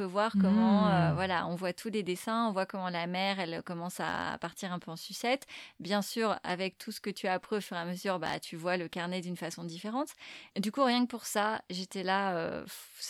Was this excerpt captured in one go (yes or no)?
yes